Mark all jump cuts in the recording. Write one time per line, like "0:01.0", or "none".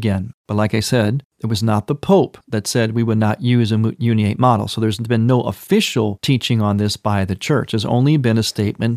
0:02.4

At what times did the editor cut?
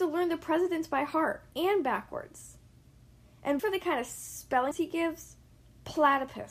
0:01.5
0:03.6
0:04.7

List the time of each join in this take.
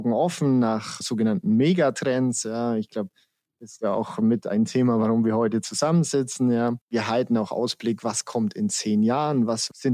0:06.8

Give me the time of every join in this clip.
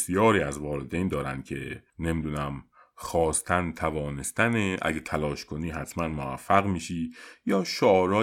0:01.9

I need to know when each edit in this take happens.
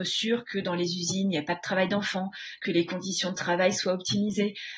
none

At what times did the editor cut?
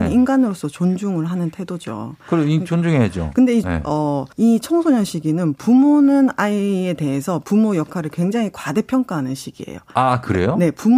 0:03.6
0:04.3

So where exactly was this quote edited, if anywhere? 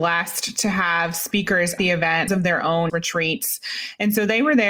0:01.8
0:02.3
0:02.9

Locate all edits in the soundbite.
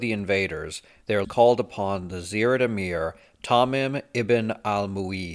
0:01.2

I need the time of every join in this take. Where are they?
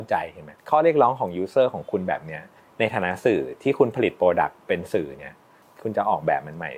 0:02.6

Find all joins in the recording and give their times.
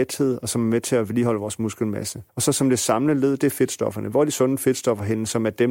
0:02.3

